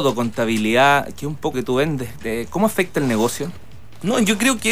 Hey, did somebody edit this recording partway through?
yes; 1 cut; at 1.5 s

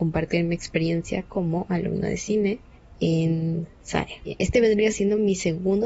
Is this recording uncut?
yes; 0 cuts

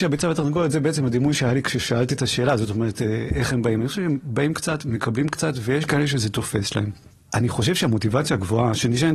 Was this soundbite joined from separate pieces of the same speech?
no; 0 cuts

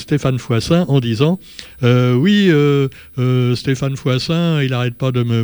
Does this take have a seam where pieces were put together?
no; 0 cuts

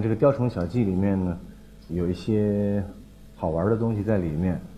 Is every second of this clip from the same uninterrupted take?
no; 1 cut; at 1.9 s

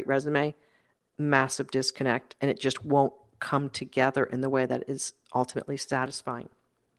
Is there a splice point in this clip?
no; 0 cuts

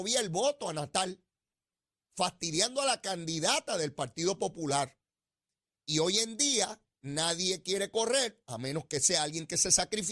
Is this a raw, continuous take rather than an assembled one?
yes; 0 cuts

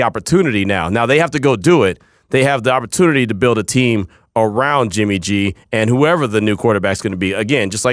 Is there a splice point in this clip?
no; 0 cuts

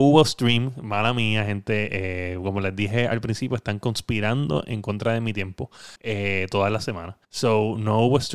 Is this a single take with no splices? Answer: no; 2 cuts; at 6.0 s, 7.2 s

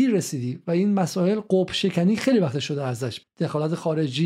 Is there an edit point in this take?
yes; 1 cut; at 3.2 s

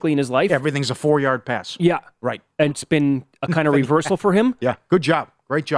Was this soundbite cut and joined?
yes; 1 cut; at 2.7 s

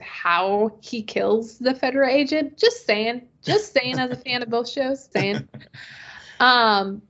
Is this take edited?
yes; 1 cut; at 5.1 s

